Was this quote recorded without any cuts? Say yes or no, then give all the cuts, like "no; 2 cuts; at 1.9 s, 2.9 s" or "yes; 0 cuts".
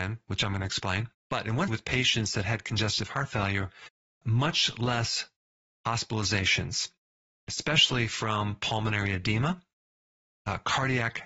no; 2 cuts; at 1.7 s, 4.2 s